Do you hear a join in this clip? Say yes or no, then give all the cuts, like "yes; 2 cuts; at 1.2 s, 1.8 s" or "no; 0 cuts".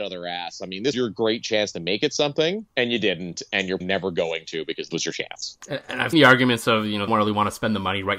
yes; 6 cuts; at 0.9 s, 2.7 s, 3.8 s, 4.9 s, 6.1 s, 7.1 s